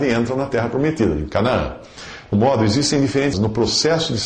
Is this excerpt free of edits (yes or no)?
no